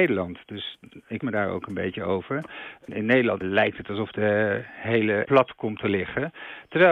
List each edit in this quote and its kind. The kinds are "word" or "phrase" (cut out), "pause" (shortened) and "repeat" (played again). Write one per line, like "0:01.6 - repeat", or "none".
0:01.2 - word
0:05.2 - word